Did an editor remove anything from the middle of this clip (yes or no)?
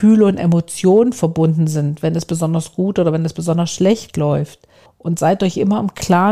yes